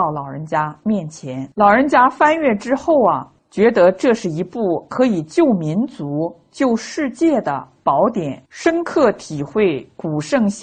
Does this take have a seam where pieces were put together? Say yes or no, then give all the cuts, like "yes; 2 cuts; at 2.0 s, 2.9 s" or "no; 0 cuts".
yes; 3 cuts; at 1.5 s, 3.4 s, 8.5 s